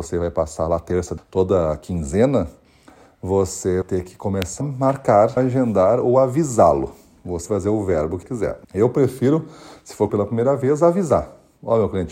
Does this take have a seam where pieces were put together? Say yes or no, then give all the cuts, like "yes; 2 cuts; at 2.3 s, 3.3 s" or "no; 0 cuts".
yes; 8 cuts; at 1.2 s, 3.8 s, 4.6 s, 5.4 s, 7.5 s, 8.2 s, 8.6 s, 10.1 s